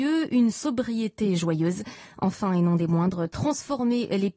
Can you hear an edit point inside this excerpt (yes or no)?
no